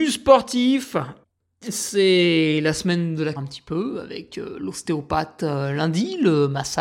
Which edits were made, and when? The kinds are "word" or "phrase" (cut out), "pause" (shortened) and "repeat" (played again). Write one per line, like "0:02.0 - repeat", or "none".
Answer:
0:01.2 - pause
0:03.4 - phrase